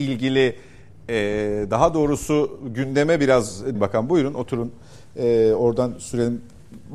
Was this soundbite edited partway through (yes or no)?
yes